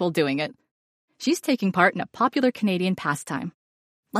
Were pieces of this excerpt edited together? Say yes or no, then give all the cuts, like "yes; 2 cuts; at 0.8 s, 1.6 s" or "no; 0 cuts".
no; 0 cuts